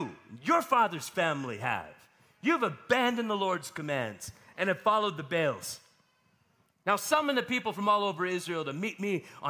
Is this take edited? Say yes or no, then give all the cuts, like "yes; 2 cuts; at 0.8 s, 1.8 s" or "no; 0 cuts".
no; 0 cuts